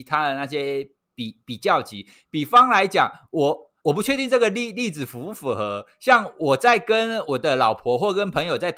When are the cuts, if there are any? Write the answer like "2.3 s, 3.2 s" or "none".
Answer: 3.8 s